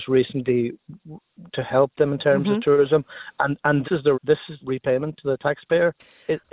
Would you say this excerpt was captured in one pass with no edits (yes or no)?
no